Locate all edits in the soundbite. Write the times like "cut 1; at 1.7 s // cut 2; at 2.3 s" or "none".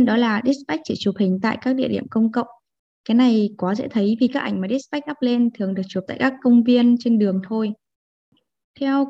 none